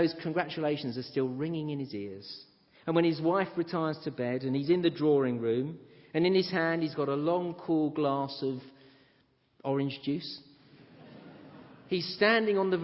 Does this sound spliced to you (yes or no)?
no